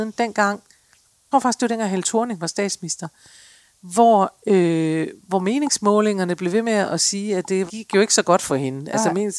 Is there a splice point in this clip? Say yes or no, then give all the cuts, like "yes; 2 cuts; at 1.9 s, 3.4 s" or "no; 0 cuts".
yes; 2 cuts; at 1.3 s, 7.7 s